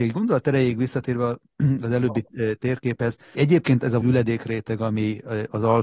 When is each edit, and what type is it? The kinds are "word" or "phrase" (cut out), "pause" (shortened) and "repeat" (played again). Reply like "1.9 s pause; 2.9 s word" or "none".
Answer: 3.3 s word; 4.0 s word